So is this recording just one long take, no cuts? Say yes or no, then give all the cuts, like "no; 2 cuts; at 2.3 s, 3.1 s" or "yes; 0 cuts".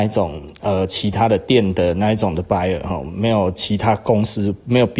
yes; 0 cuts